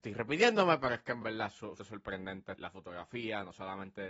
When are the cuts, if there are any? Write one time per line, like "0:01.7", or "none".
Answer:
0:01.2
0:01.8
0:02.5